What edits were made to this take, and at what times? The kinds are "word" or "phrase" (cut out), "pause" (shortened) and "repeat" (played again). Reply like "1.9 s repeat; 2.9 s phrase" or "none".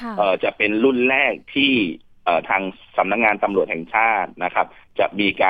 none